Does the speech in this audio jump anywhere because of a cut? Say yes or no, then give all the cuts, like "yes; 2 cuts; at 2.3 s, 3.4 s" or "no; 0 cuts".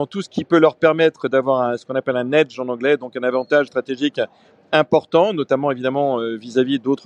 yes; 1 cut; at 3.7 s